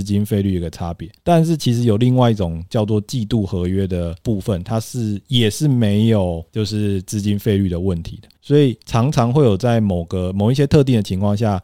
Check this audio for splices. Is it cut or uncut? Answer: cut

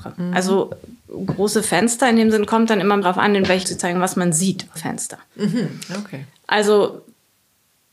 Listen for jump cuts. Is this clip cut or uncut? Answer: cut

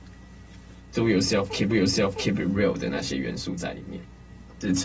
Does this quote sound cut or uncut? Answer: cut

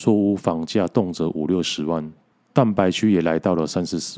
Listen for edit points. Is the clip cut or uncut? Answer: cut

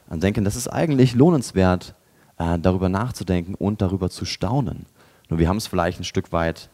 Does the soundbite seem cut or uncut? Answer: uncut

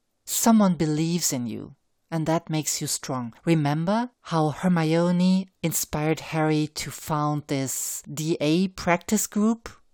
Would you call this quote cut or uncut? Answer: uncut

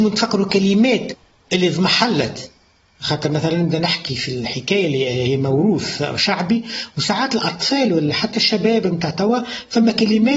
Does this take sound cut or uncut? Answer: uncut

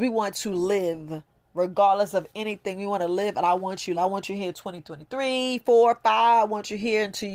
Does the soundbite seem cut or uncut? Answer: cut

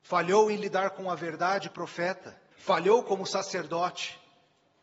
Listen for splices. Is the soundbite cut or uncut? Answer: cut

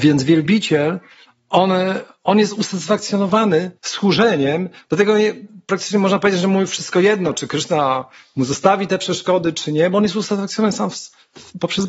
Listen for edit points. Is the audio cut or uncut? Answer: cut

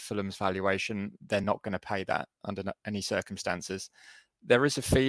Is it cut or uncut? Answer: uncut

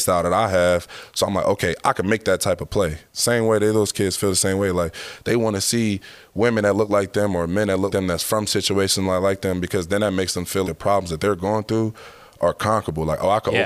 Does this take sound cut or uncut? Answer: cut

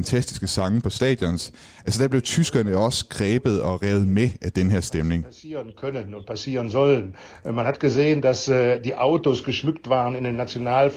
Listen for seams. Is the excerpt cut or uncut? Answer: uncut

